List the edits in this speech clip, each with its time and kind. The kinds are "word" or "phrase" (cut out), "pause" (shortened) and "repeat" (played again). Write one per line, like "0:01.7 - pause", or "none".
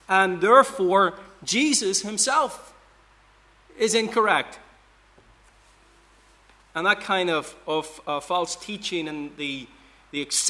none